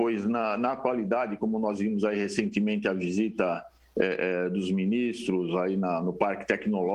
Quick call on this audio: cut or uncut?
uncut